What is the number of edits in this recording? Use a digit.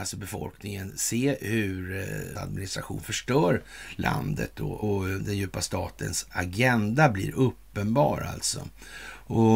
2